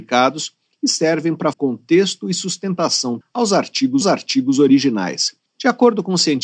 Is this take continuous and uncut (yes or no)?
no